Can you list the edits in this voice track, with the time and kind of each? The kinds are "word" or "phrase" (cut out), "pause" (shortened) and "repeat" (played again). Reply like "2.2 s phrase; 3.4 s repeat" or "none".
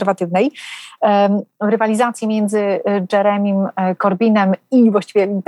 none